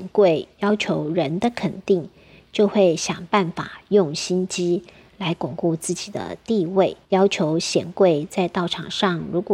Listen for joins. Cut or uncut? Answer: cut